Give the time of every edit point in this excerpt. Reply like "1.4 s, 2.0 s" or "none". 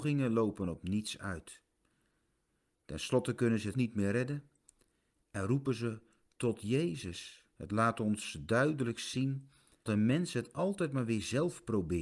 3.7 s, 7.5 s, 9.9 s